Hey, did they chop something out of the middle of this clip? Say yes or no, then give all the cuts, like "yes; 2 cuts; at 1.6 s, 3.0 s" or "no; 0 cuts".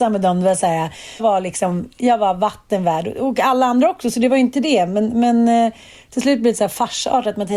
yes; 1 cut; at 1.2 s